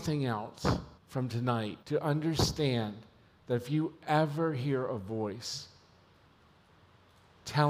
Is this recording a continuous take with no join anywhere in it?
no; 2 cuts; at 1.0 s, 1.8 s

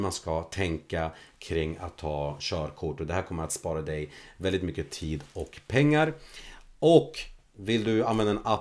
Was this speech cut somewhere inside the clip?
no; 0 cuts

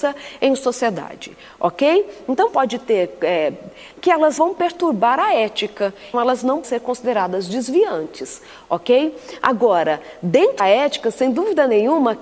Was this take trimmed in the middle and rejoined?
yes; 6 cuts; at 2.5 s, 3.9 s, 4.4 s, 6.1 s, 6.6 s, 10.6 s

